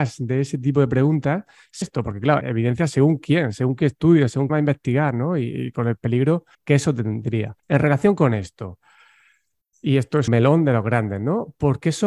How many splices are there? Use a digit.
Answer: 6